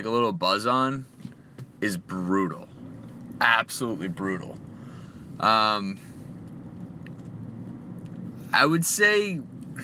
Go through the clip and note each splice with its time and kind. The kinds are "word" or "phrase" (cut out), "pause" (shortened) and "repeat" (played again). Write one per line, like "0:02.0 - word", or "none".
none